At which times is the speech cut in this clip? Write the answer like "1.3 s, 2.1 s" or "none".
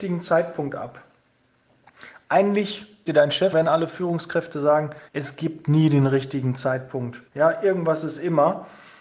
3.1 s, 3.5 s, 5.1 s, 7.3 s